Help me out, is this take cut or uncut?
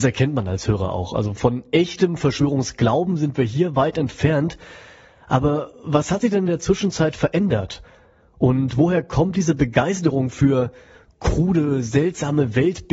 uncut